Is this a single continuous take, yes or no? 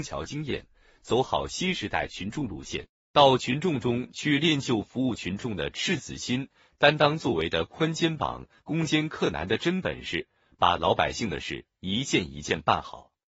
yes